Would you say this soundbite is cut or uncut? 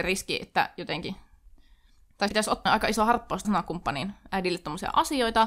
cut